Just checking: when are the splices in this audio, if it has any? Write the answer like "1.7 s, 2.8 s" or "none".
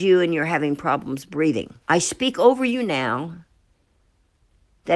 1.8 s